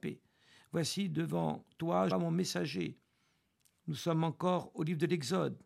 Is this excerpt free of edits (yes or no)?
no